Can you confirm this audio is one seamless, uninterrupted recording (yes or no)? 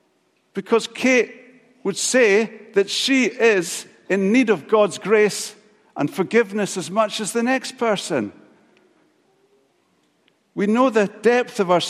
yes